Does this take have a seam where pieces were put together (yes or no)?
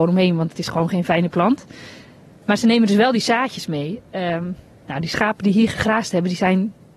no